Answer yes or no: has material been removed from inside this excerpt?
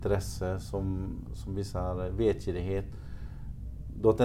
yes